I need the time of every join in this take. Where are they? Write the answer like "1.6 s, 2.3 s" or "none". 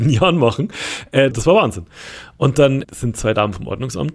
1.3 s, 2.8 s